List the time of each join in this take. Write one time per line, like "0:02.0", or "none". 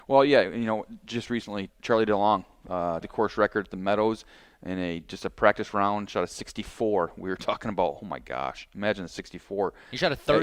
0:01.7
0:03.0